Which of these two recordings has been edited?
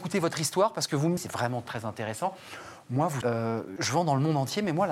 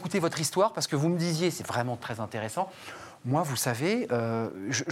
first; 3 cuts; at 1.2 s, 3.2 s, 3.8 s

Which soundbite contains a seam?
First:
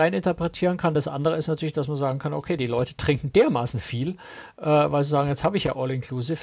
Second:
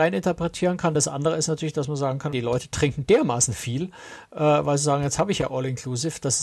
second; 1 cut; at 2.3 s

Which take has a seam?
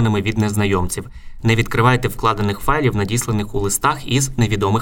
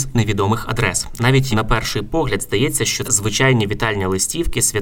second; 2 cuts; at 1.5 s, 3.0 s

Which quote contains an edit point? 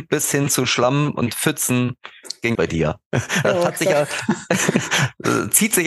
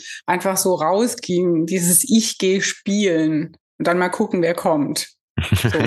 first; 1 cut; at 2.5 s

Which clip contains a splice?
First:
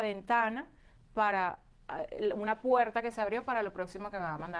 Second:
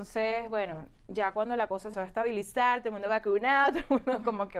second; 1 cut; at 1.9 s

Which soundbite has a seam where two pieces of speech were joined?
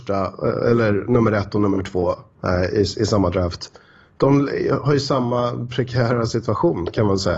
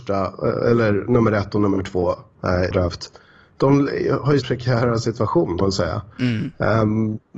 second; 3 cuts; at 2.7 s, 4.4 s, 5.6 s

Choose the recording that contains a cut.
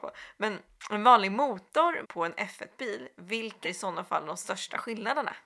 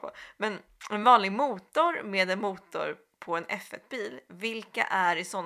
first; 2 cuts; at 2.0 s, 3.6 s

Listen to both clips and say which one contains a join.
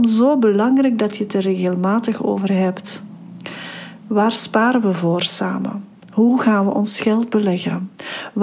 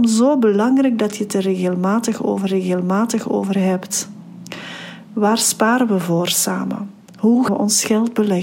second; 2 cuts; at 2.5 s, 7.5 s

